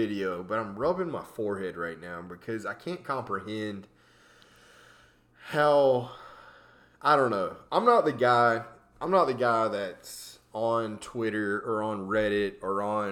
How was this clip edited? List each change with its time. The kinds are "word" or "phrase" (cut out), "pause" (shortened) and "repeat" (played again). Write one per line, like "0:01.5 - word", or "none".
none